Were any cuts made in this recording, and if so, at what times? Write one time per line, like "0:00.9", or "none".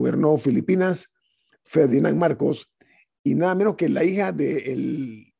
none